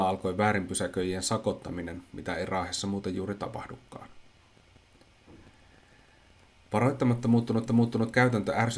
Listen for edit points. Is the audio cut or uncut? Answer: cut